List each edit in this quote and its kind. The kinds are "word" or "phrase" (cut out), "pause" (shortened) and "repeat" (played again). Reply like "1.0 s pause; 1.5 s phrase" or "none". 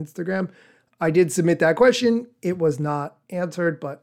none

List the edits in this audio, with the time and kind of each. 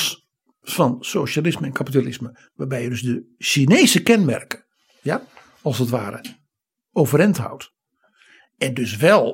none

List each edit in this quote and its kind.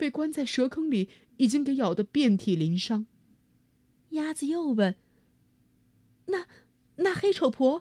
3.3 s pause

